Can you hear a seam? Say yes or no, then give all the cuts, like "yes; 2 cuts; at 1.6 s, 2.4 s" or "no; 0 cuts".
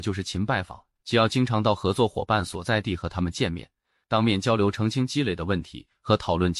no; 0 cuts